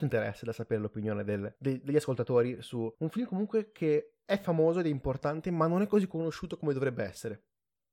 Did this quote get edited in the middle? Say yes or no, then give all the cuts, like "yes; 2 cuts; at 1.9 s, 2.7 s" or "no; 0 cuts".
yes; 2 cuts; at 1.6 s, 2.9 s